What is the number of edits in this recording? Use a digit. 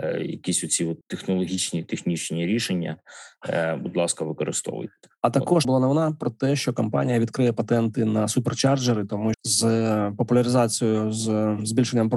3